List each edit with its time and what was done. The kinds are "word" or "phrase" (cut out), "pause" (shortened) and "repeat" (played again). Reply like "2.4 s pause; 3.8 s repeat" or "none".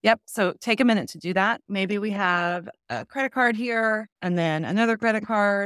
4.1 s pause